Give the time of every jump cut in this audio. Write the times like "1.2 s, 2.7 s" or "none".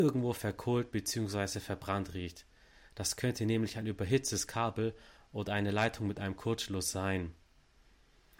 none